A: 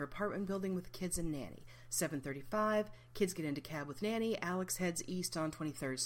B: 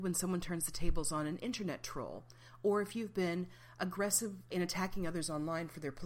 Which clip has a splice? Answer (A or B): B